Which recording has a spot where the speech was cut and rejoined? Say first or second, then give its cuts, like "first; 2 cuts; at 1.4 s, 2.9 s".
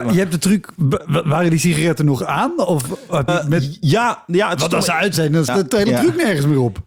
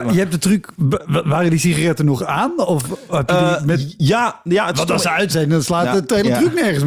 first; 2 cuts; at 3.3 s, 5.5 s